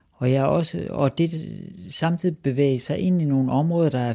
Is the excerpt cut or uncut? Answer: uncut